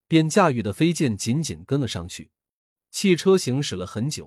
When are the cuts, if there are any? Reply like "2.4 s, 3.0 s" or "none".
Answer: 2.6 s